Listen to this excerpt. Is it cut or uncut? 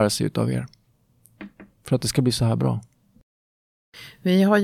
uncut